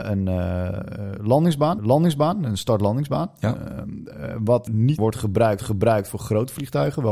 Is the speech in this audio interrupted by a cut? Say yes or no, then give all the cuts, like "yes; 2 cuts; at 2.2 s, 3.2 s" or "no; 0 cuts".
yes; 4 cuts; at 1.8 s, 4.7 s, 5.0 s, 5.6 s